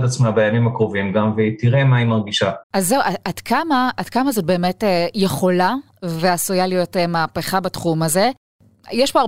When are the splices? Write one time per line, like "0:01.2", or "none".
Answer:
0:02.6